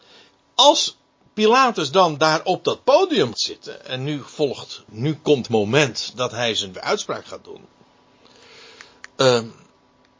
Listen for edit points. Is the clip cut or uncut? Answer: cut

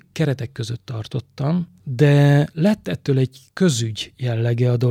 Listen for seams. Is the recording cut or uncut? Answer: uncut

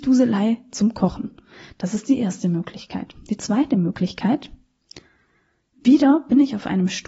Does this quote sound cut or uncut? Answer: uncut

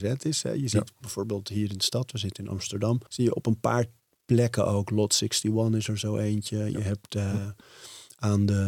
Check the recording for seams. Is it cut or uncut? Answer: cut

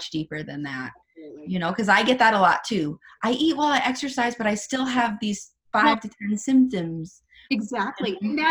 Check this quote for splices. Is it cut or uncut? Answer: uncut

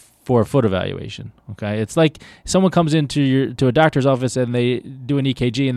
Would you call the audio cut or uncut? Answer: uncut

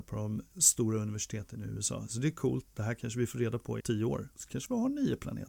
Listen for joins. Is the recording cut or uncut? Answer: cut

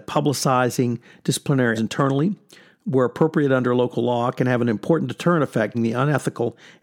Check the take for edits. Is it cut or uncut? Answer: cut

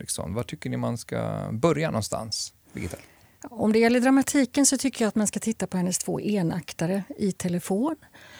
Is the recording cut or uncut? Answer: cut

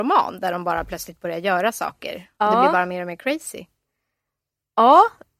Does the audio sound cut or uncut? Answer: uncut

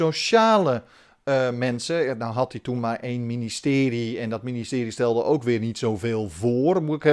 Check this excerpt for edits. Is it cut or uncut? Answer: uncut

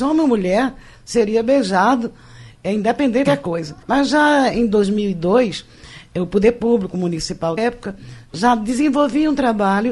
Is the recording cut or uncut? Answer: cut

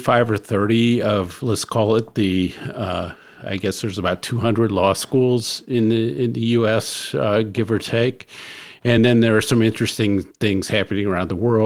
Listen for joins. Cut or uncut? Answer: uncut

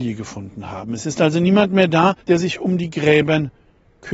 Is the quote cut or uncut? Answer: cut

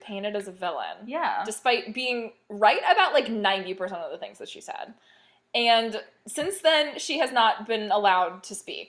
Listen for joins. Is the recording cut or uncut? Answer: uncut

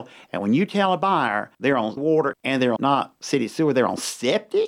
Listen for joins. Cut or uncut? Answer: cut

